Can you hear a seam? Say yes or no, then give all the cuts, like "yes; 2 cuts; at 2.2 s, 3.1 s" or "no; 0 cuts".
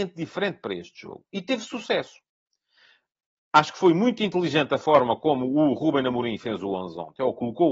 no; 0 cuts